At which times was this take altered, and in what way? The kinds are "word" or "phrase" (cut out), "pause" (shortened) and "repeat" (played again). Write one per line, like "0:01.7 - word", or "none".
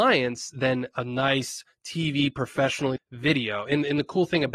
0:03.0 - word